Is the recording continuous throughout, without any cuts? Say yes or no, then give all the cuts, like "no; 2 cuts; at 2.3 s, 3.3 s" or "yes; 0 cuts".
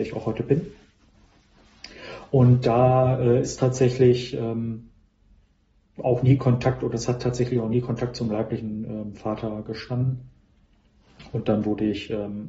yes; 0 cuts